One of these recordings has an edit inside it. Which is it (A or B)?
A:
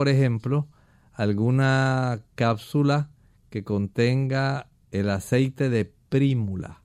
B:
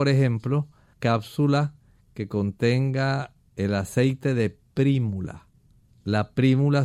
B